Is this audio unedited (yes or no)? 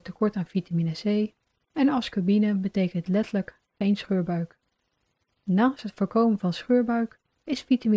yes